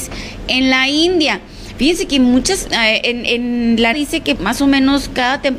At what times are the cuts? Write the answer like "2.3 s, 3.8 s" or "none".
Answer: 2.7 s, 3.9 s, 4.3 s